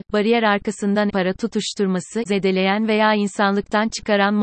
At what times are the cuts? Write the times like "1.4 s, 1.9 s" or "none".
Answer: 1.1 s, 2.3 s